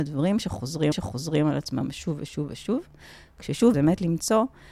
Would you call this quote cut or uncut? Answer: cut